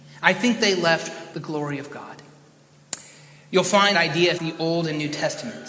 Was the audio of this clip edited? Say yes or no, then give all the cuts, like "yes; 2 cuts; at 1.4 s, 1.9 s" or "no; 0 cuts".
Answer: yes; 3 cuts; at 1.3 s, 3.9 s, 4.4 s